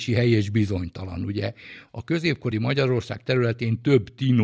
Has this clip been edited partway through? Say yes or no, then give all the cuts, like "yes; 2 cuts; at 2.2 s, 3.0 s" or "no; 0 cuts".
no; 0 cuts